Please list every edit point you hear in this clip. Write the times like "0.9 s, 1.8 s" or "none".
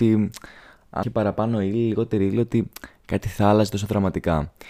1.0 s